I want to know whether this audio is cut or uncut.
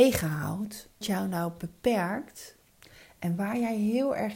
cut